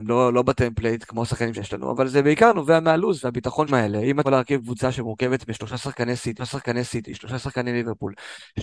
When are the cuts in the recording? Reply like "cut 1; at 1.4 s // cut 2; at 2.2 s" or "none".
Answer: cut 1; at 1.5 s // cut 2; at 3.7 s // cut 3; at 4.2 s // cut 4; at 6.4 s